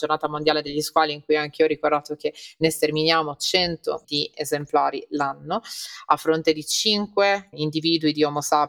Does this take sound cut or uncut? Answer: cut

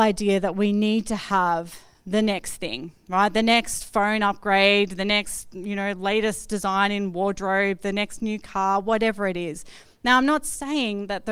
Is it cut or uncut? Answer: uncut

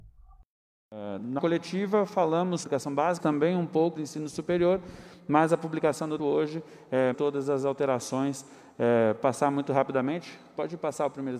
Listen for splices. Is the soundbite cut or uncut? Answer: cut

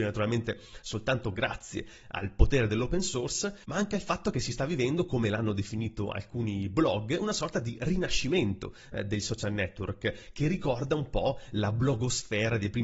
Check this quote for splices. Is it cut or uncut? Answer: uncut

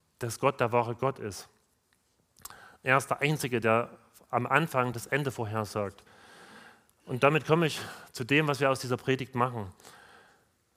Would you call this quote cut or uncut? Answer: uncut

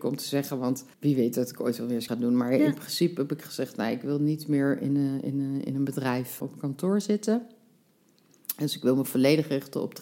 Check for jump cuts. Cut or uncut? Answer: cut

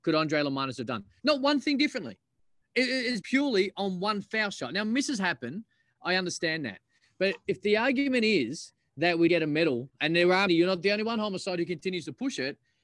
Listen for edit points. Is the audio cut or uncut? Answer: cut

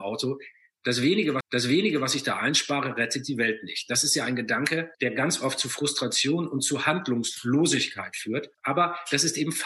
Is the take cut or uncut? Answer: cut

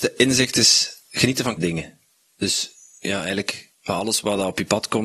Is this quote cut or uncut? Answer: cut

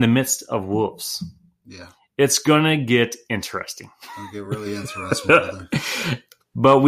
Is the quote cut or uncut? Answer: uncut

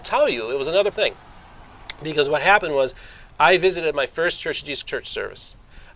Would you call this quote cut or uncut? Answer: cut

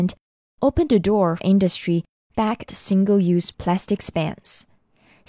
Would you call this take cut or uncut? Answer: cut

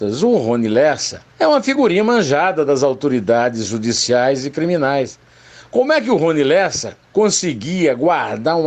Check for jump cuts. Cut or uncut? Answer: cut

